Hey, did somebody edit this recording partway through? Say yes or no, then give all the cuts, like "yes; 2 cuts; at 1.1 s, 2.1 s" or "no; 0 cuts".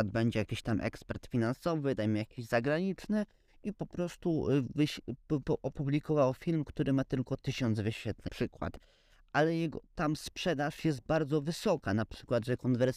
yes; 2 cuts; at 3.7 s, 8.3 s